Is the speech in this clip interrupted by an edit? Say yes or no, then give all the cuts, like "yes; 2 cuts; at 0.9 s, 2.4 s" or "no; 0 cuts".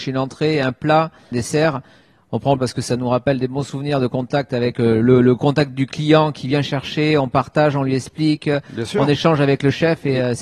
yes; 2 cuts; at 1.3 s, 2.6 s